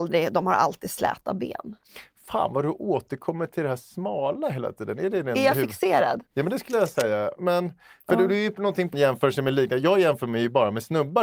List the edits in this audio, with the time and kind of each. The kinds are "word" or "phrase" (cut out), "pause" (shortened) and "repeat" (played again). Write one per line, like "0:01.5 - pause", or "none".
0:06.3 - pause
0:08.9 - phrase

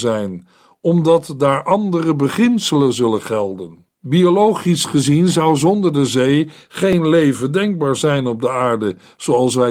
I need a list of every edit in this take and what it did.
0:03.9 - pause

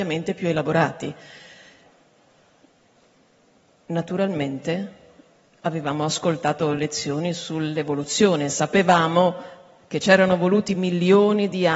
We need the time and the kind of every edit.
none

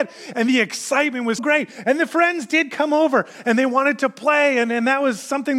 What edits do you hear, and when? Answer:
0:01.4 - word

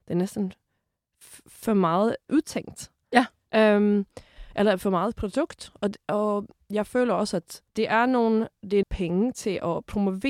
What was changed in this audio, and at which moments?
0:07.7 - pause
0:08.8 - phrase

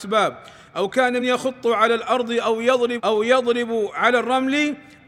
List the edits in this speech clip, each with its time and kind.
0:01.2 - word
0:03.0 - word

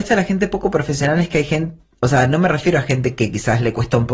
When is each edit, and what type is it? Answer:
none

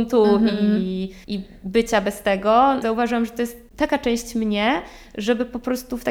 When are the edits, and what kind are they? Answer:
0:01.2 - pause
0:02.8 - word

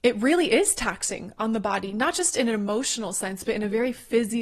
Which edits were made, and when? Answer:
none

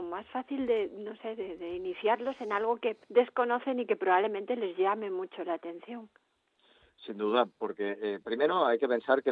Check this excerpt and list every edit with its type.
0:03.0 - pause

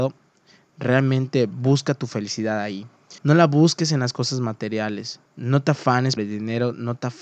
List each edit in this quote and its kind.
0:03.2 - pause
0:05.3 - pause
0:06.2 - word

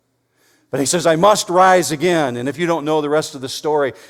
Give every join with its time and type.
none

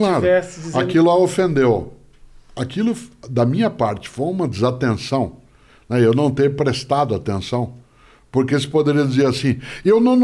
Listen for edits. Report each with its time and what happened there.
none

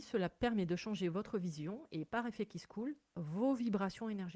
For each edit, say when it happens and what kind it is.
none

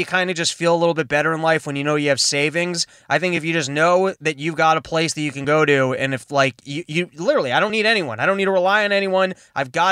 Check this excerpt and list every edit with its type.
none

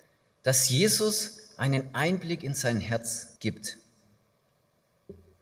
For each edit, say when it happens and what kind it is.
0:03.4 - pause

